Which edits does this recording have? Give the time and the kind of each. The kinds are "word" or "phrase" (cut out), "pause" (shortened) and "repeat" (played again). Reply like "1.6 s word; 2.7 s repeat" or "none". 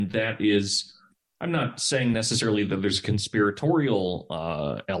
none